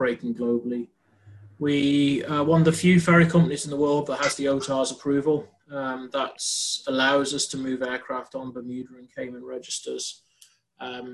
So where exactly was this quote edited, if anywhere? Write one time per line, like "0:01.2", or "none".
none